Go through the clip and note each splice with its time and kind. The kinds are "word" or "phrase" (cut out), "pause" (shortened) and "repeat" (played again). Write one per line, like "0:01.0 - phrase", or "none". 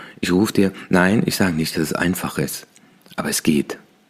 none